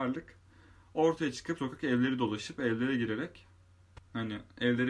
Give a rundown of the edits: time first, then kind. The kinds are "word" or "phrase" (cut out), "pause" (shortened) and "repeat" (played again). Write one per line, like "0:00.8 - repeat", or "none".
0:01.6 - word